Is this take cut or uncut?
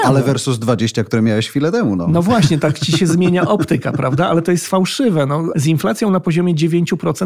uncut